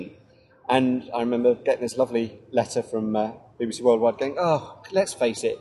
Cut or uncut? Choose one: uncut